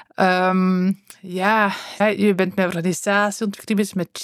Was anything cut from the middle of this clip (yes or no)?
yes